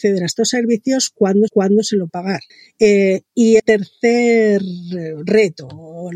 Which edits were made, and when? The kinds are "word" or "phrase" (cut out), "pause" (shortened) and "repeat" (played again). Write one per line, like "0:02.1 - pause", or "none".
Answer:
0:01.5 - repeat
0:02.1 - word
0:02.5 - pause
0:03.6 - word